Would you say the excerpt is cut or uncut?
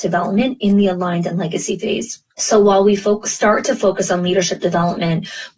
cut